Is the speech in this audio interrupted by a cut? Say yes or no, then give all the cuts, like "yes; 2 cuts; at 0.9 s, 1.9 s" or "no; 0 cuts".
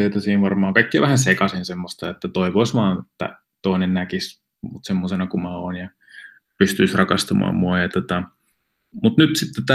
no; 0 cuts